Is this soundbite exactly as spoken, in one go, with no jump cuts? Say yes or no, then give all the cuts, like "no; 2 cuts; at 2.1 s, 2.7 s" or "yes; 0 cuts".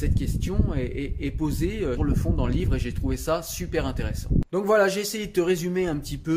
no; 1 cut; at 2.0 s